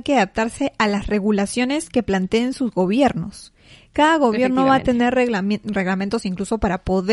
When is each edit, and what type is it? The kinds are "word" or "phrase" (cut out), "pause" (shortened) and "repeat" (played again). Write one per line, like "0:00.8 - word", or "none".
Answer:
none